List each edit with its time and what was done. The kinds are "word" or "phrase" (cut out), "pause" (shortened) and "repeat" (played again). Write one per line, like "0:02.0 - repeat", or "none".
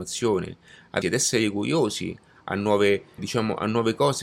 0:01.0 - word
0:03.2 - word